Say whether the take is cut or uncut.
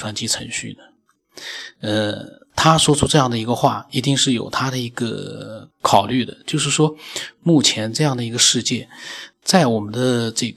cut